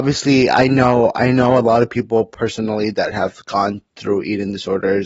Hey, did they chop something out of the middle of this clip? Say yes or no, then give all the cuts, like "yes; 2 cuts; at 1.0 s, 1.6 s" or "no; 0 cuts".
no; 0 cuts